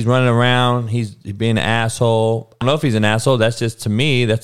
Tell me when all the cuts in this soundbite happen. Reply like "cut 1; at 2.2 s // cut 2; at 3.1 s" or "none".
cut 1; at 2.6 s